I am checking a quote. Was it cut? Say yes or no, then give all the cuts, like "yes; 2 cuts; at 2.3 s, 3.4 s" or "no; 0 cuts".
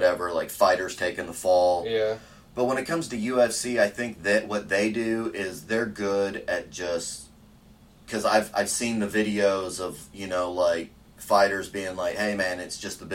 no; 0 cuts